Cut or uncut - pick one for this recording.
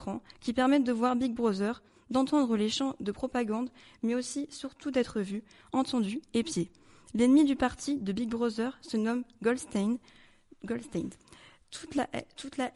uncut